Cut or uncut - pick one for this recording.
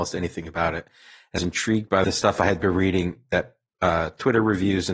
cut